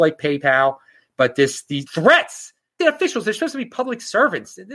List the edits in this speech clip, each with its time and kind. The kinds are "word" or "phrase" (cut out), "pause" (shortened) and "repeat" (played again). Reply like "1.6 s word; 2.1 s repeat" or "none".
1.9 s word; 2.8 s phrase